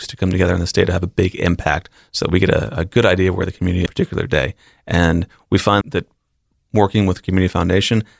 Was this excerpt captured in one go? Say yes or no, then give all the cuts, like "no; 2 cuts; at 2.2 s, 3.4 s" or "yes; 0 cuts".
no; 2 cuts; at 3.9 s, 5.8 s